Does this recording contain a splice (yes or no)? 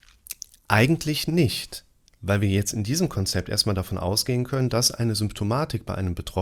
no